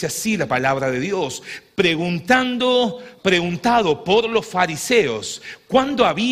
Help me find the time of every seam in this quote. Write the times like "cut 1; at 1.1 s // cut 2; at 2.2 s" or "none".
cut 1; at 3.2 s

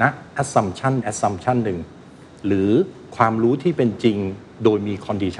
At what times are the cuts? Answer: cut 1; at 1.0 s

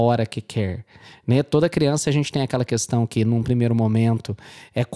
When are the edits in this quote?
none

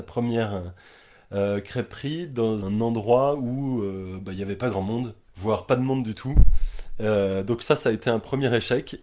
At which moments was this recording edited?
cut 1; at 2.6 s // cut 2; at 5.3 s

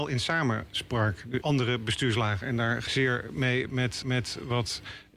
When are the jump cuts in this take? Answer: cut 1; at 1.4 s // cut 2; at 2.9 s // cut 3; at 4.0 s

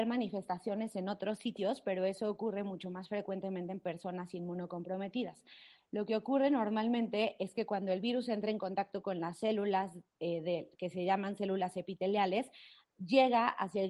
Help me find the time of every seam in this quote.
none

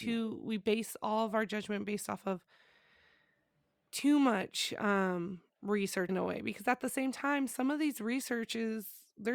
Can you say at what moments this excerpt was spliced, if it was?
cut 1; at 6.1 s

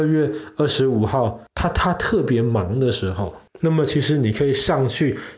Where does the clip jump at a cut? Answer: cut 1; at 1.5 s // cut 2; at 3.5 s

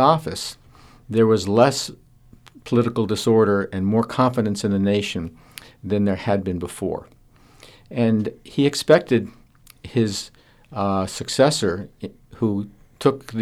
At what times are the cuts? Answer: none

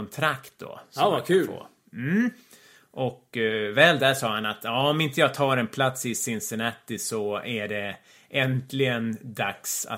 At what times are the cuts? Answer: none

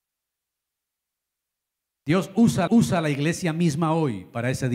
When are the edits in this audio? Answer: cut 1; at 2.7 s

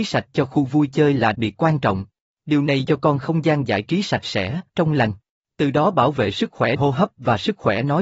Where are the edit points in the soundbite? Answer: cut 1; at 1.3 s // cut 2; at 2.2 s // cut 3; at 2.8 s // cut 4; at 4.7 s // cut 5; at 5.3 s // cut 6; at 6.8 s

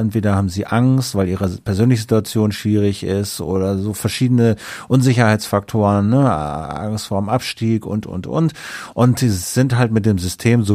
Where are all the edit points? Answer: none

